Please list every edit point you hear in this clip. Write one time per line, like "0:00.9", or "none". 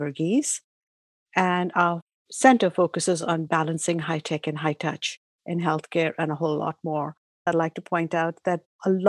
none

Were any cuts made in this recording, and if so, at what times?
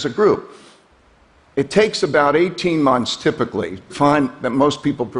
0:03.9

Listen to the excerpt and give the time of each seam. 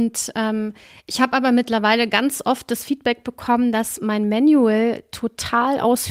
none

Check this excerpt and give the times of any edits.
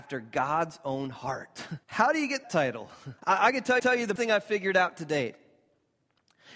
0:01.8
0:02.4
0:03.2
0:03.8
0:04.2

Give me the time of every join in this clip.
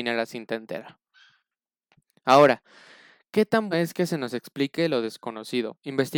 0:03.7

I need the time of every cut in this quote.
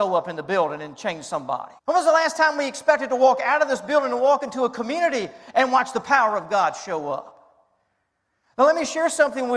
0:01.8

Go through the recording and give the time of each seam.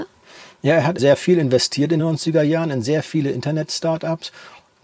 0:01.0
0:02.0

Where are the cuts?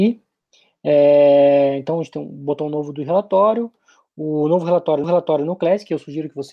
0:05.0

